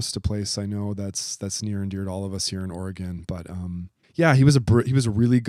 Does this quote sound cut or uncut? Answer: cut